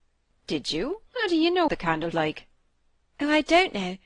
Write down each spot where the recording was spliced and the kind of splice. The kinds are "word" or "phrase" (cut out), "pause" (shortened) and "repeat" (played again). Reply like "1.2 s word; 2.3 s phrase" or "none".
1.1 s pause; 1.7 s word; 2.1 s word